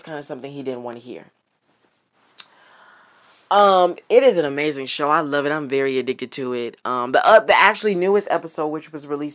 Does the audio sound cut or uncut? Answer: uncut